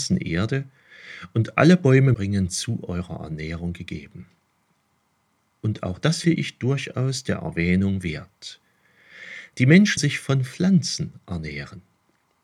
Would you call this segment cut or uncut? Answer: cut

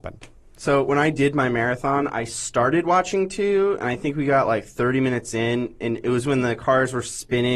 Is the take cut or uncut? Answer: uncut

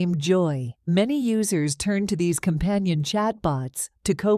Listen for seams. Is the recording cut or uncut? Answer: uncut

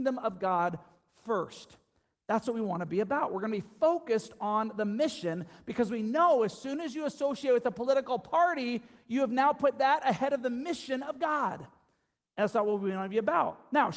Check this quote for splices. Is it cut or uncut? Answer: uncut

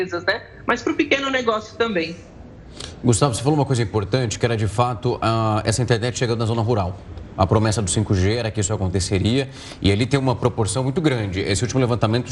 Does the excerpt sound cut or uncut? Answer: uncut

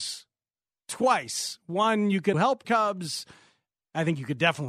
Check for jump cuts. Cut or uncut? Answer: cut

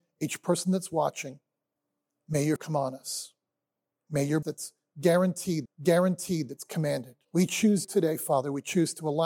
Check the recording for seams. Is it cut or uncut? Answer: cut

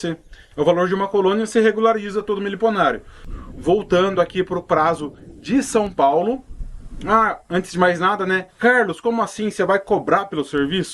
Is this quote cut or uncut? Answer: cut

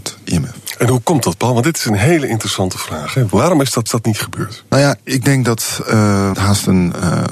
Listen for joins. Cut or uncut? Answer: cut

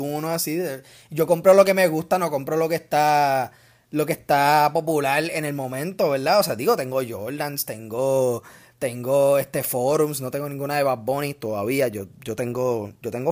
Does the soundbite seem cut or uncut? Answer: uncut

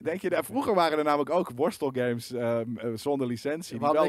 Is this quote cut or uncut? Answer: uncut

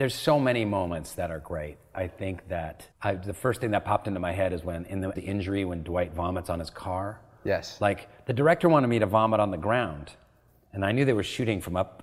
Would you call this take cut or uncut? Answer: cut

